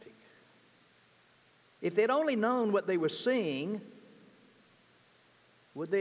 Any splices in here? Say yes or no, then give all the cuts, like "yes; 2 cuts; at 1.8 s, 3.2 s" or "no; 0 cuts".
no; 0 cuts